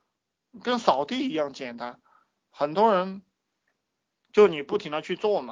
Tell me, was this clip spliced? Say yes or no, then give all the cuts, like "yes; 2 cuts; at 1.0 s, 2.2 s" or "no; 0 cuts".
no; 0 cuts